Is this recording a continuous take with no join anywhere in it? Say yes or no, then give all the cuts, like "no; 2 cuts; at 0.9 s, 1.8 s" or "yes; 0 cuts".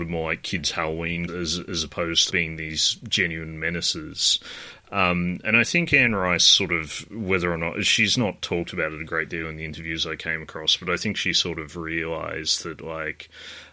no; 2 cuts; at 1.3 s, 2.3 s